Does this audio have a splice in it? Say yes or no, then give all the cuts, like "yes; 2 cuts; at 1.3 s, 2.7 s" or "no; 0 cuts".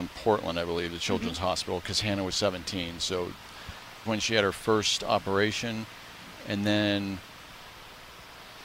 yes; 2 cuts; at 2.3 s, 4.1 s